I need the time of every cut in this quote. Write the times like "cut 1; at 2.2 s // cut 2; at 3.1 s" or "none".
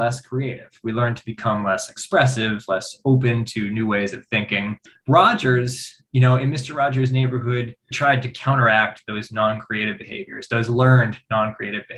cut 1; at 4.9 s // cut 2; at 7.9 s